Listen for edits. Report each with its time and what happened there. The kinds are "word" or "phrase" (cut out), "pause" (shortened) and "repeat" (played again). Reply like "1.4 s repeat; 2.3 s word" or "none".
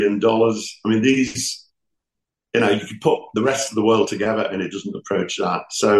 none